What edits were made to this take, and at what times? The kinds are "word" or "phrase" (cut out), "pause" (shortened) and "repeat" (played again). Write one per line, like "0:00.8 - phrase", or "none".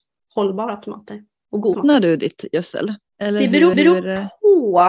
0:01.7 - word
0:03.7 - repeat